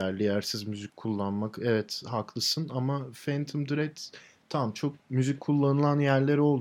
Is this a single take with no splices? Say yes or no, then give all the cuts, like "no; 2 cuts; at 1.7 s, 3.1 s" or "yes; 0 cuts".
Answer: yes; 0 cuts